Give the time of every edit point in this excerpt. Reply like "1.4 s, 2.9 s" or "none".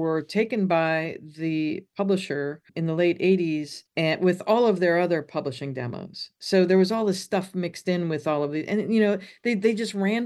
2.7 s, 3.9 s